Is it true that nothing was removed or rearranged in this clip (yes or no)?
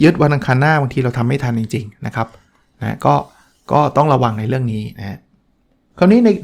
yes